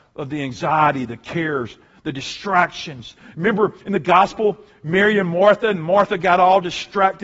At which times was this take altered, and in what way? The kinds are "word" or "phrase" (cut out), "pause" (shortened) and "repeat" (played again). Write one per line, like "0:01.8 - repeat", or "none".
none